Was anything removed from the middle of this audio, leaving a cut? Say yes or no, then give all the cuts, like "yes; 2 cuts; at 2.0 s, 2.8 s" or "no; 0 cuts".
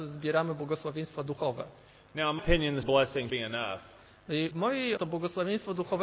yes; 5 cuts; at 2.4 s, 2.8 s, 3.3 s, 4.5 s, 5.0 s